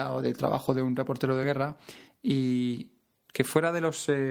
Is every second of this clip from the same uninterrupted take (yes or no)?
yes